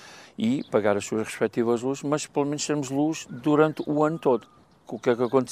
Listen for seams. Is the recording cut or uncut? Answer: uncut